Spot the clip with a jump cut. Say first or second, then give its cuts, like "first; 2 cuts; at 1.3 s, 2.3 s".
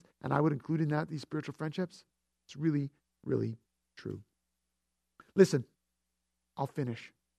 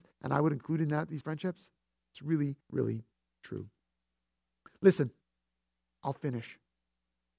second; 2 cuts; at 1.2 s, 2.6 s